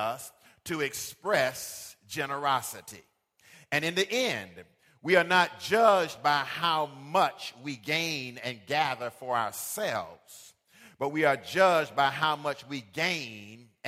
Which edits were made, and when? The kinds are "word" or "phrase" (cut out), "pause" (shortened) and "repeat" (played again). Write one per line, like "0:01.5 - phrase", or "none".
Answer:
none